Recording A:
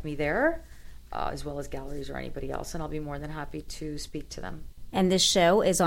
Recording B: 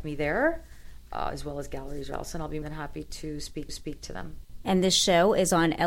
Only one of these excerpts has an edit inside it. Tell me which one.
B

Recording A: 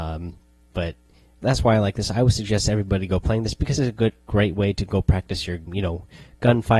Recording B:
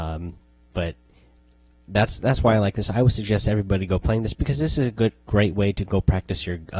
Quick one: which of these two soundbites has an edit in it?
A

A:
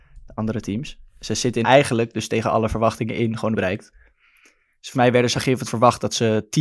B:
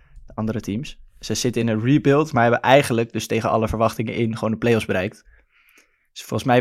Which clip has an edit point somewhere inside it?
A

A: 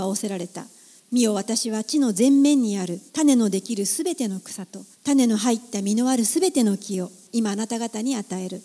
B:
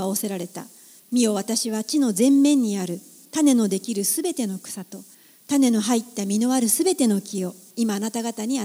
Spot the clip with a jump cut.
A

